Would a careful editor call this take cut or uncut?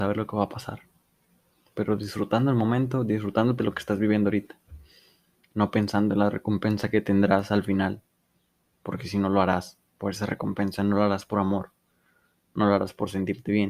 cut